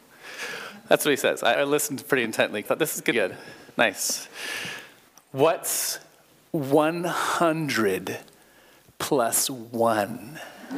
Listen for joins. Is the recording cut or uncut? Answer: cut